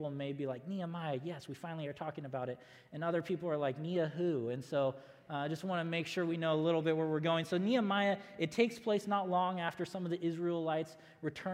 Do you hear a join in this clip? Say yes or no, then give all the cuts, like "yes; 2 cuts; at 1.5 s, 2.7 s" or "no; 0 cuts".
no; 0 cuts